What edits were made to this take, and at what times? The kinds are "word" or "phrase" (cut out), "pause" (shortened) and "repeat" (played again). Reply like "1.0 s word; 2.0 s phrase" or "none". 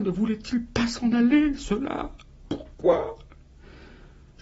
none